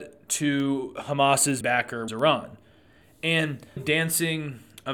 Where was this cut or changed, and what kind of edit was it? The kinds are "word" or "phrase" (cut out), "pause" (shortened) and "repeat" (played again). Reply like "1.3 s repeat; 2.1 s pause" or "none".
1.6 s word; 2.1 s phrase; 3.8 s phrase

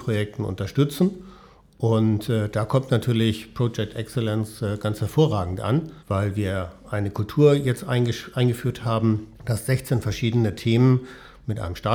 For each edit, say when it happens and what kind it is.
6.0 s pause; 9.3 s pause

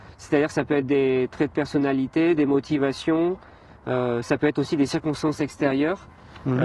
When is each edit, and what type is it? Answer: none

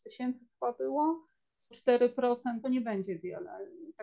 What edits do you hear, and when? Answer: 1.7 s word; 2.6 s phrase

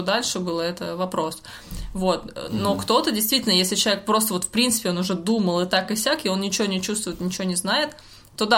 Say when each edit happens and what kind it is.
none

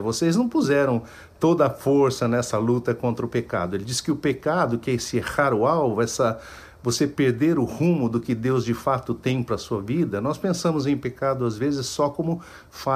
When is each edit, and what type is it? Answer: none

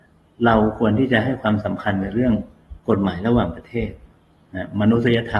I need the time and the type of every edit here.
2.8 s pause

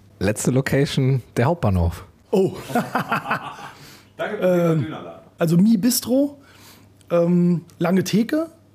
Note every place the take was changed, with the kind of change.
none

